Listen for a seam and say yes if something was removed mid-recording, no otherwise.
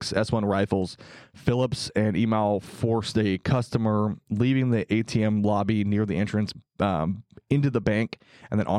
no